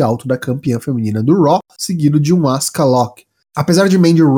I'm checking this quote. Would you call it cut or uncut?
uncut